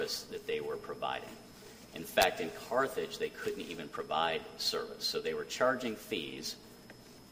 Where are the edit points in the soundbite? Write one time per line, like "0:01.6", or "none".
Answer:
none